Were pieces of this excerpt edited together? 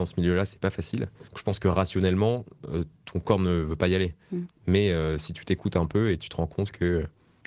yes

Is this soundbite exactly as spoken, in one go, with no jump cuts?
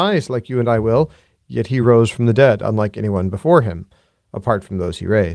yes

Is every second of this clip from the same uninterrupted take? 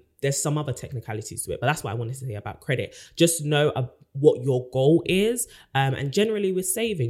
yes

